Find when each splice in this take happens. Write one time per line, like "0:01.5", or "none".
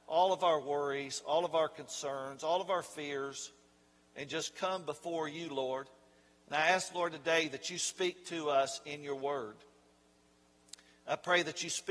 none